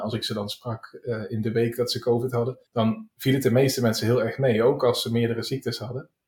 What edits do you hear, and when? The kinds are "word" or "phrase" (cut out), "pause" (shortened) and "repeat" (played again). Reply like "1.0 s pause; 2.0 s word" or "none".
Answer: 2.7 s pause